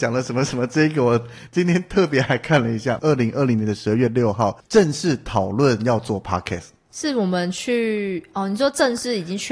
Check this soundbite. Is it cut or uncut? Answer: cut